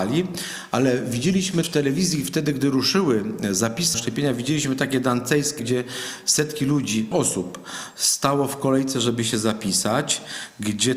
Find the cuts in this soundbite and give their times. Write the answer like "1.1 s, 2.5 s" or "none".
1.6 s, 3.9 s, 5.6 s, 7.1 s